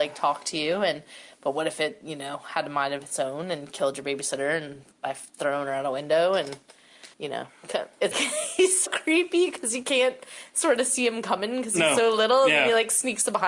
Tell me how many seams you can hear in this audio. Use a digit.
3